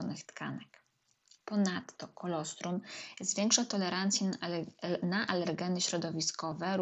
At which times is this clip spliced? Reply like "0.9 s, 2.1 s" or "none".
none